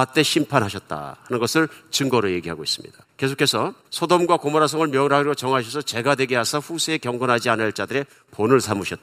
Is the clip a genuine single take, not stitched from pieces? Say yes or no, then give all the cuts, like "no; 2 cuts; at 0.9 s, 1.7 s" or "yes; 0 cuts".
no; 1 cut; at 3.0 s